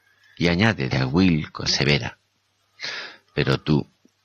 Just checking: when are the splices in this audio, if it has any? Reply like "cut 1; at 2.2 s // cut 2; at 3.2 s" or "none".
cut 1; at 0.9 s // cut 2; at 1.7 s